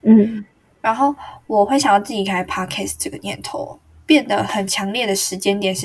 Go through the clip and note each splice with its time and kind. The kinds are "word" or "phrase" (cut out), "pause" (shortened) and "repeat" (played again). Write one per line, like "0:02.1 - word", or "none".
none